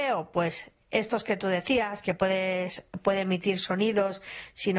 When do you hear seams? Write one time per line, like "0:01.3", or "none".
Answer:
none